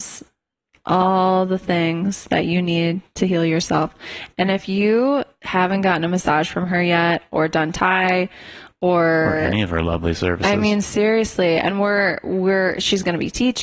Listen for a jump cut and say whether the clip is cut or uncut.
uncut